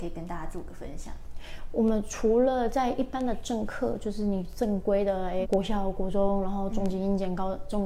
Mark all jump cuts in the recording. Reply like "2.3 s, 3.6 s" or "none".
5.4 s